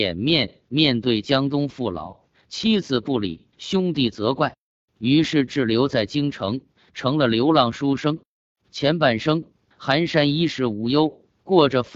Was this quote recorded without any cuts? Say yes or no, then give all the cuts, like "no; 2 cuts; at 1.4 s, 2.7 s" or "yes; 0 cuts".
no; 1 cut; at 3.5 s